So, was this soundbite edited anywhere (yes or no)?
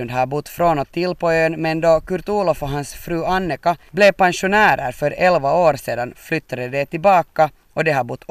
no